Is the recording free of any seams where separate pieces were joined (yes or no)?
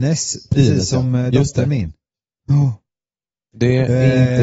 yes